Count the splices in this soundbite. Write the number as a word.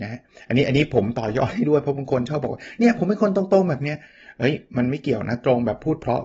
zero